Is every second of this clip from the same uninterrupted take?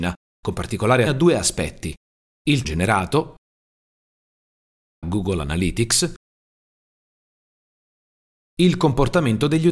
no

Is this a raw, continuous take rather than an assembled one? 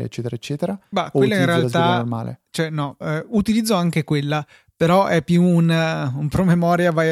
yes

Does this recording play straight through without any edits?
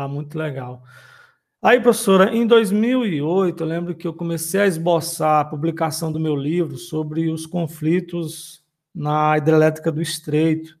yes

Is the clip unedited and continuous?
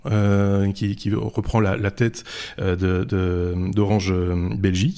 yes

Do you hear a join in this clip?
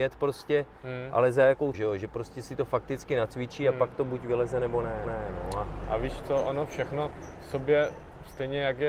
yes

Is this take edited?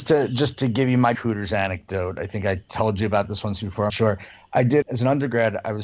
yes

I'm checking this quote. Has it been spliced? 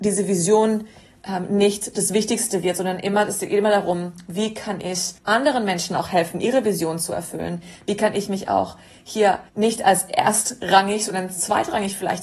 yes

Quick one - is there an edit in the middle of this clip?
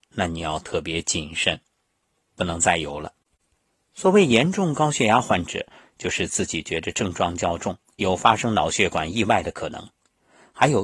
no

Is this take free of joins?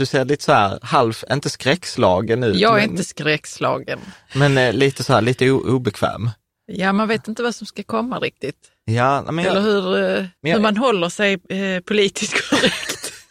no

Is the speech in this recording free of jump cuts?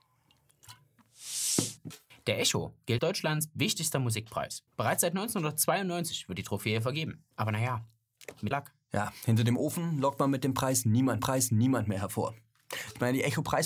no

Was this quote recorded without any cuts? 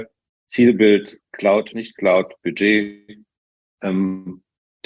no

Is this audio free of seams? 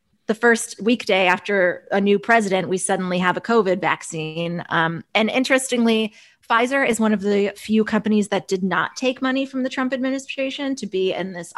yes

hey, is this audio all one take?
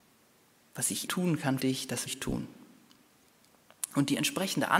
no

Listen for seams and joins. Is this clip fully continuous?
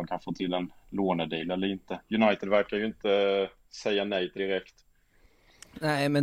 no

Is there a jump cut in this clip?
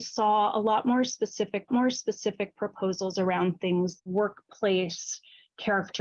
yes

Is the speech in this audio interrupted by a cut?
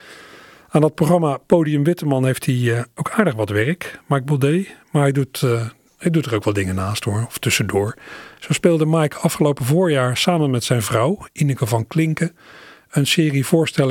no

